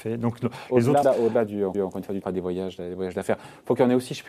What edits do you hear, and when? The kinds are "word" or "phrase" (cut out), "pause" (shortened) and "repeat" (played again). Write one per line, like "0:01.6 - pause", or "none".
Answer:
0:01.0 - word
0:01.7 - repeat
0:02.2 - word